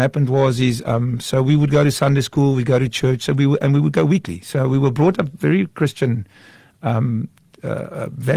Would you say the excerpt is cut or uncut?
uncut